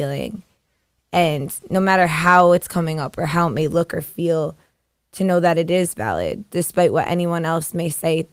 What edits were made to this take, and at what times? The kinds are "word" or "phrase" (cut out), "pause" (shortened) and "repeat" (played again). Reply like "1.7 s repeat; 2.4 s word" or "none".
none